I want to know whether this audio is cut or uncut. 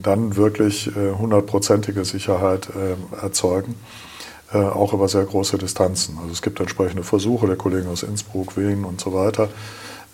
uncut